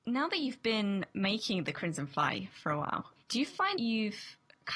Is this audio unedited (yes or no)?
no